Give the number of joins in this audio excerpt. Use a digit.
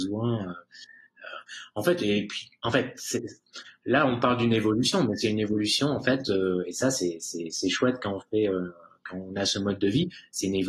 0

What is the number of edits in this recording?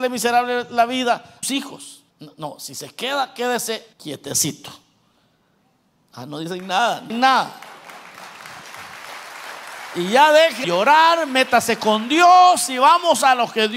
5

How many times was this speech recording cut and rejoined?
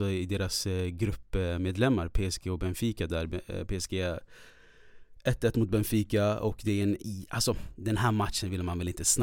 0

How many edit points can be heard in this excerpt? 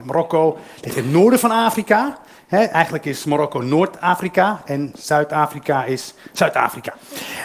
0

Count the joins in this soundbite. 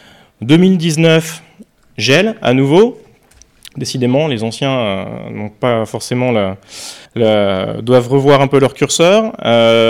1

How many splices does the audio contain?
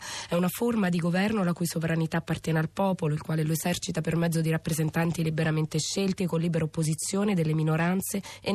0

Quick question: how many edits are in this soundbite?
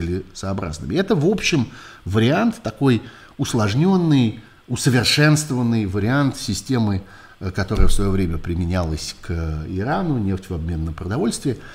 0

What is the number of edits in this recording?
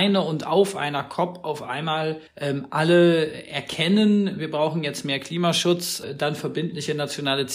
1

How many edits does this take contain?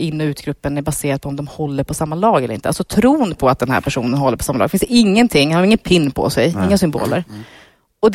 0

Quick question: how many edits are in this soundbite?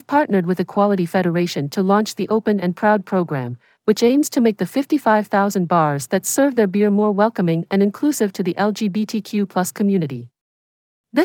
0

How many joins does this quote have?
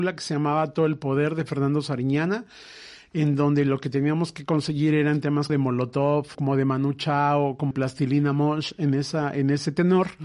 3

